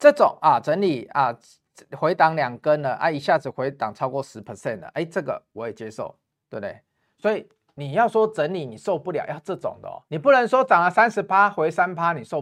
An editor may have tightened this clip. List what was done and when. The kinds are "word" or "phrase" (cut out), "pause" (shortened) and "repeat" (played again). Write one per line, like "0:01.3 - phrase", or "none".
0:10.1 - pause